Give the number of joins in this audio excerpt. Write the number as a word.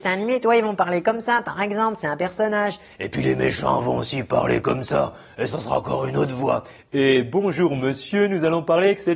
one